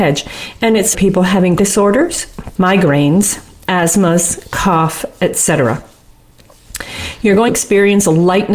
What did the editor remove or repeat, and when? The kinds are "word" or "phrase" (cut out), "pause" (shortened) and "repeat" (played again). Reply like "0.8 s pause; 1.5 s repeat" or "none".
0.9 s phrase; 1.6 s phrase; 2.5 s word; 7.5 s word